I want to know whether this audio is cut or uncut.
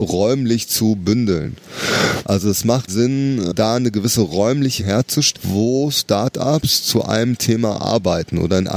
cut